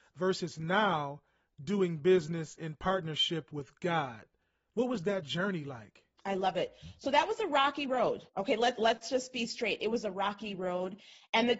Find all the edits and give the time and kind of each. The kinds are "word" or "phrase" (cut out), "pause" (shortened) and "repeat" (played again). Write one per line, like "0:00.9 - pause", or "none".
0:08.3 - pause
0:08.8 - word